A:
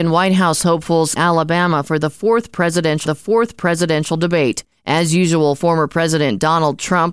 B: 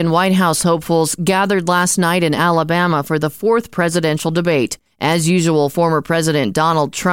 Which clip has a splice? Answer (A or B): A